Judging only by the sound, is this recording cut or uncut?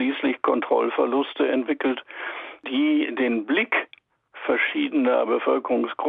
uncut